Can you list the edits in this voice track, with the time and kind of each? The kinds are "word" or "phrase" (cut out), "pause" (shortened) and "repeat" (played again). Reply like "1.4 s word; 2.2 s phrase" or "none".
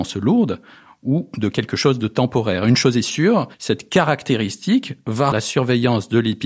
3.5 s pause; 5.3 s word

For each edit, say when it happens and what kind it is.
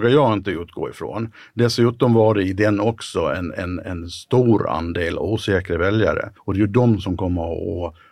6.4 s pause

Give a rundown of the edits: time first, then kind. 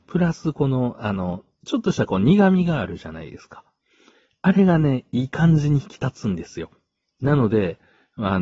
none

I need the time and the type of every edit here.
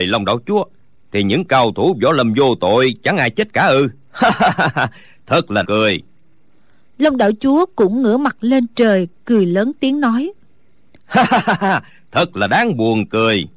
5.6 s phrase

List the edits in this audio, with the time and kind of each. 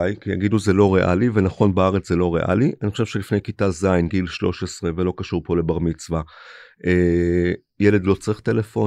none

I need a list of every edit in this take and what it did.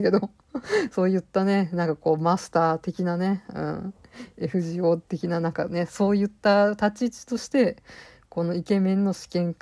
none

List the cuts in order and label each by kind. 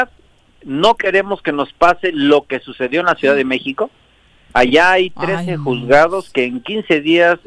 none

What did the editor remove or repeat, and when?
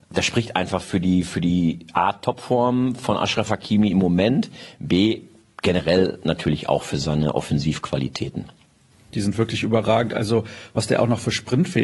none

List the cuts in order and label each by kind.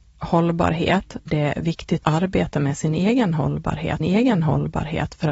1.3 s phrase; 2.0 s word; 4.0 s repeat

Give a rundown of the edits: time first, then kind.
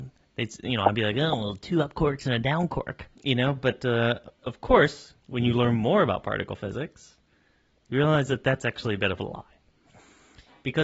3.1 s pause; 4.3 s pause; 5.2 s pause

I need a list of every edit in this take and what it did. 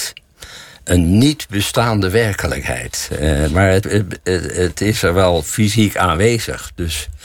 3.8 s word

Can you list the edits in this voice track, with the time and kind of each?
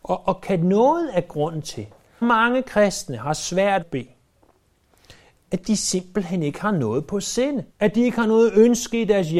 2.2 s phrase; 3.8 s phrase; 5.4 s word; 7.7 s pause

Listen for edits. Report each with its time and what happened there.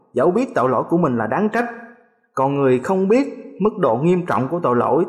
none

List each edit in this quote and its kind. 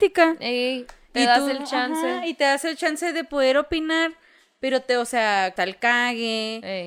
5.6 s word

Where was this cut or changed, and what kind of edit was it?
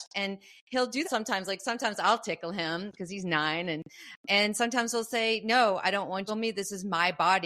1.0 s word; 4.2 s word; 6.3 s phrase

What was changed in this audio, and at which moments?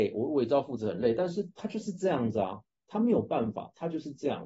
none

